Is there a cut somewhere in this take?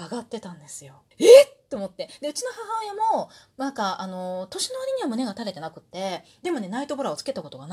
yes; 1 cut; at 1.1 s

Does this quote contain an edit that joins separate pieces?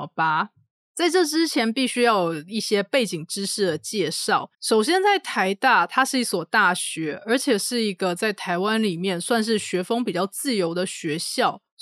yes; 1 cut; at 4.5 s

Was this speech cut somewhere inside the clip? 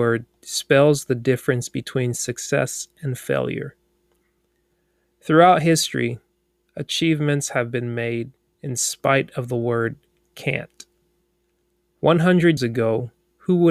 yes; 1 cut; at 12.6 s

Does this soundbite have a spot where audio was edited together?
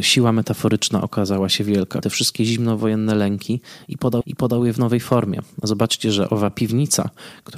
yes; 2 cuts; at 2.0 s, 4.2 s

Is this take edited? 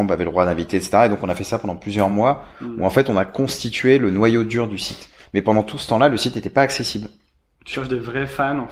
no; 0 cuts

